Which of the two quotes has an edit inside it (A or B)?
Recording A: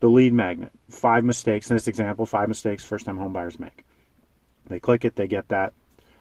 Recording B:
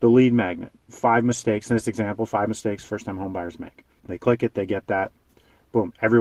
B